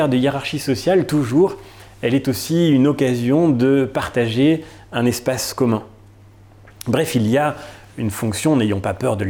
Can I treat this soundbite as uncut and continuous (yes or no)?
yes